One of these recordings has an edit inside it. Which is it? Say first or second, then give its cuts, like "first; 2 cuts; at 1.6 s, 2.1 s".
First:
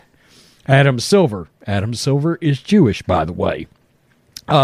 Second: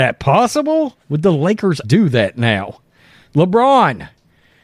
second; 2 cuts; at 1.0 s, 1.8 s